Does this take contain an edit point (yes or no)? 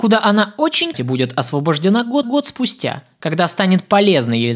yes